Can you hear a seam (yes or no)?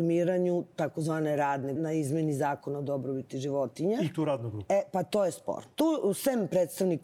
yes